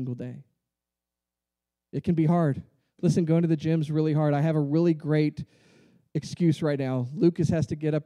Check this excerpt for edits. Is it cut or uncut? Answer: uncut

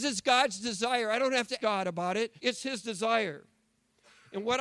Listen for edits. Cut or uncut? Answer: cut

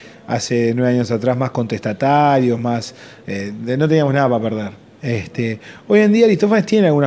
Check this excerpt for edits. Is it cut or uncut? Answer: uncut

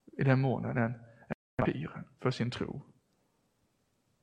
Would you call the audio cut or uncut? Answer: uncut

